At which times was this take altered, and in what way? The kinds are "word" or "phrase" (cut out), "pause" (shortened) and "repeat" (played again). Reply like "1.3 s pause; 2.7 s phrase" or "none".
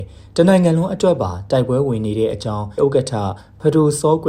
2.8 s word